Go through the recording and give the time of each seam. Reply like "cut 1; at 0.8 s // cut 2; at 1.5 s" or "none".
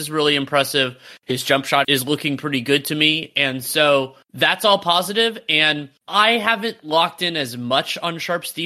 cut 1; at 1.8 s // cut 2; at 4.2 s // cut 3; at 6.0 s